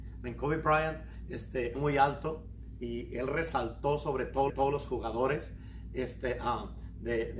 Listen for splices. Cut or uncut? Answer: cut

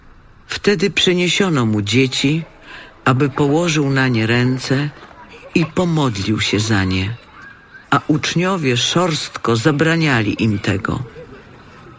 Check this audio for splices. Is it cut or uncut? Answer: cut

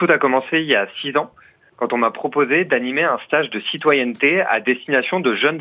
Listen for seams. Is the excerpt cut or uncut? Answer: uncut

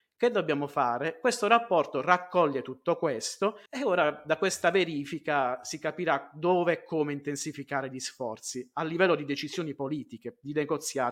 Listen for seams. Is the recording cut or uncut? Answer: cut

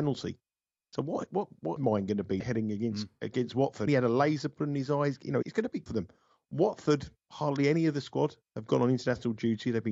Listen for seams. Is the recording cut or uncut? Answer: cut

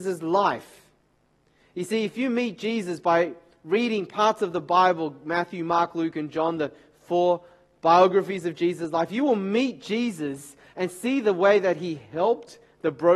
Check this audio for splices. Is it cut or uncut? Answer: uncut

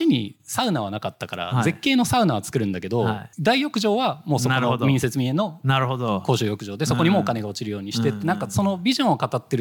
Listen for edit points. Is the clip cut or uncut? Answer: cut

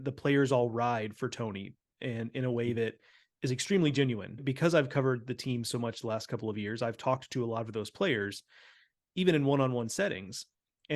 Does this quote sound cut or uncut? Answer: uncut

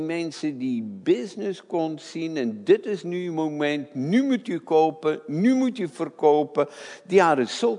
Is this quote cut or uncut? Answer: uncut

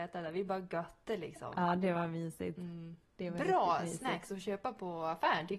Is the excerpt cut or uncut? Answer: cut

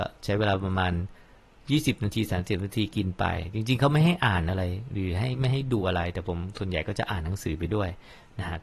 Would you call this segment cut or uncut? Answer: uncut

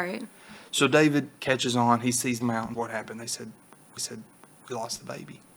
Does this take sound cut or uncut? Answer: cut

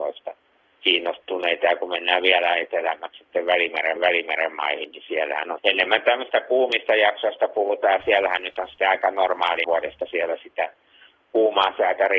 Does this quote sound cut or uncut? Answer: cut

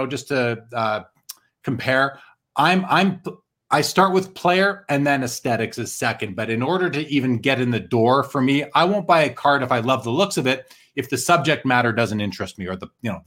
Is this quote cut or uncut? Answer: uncut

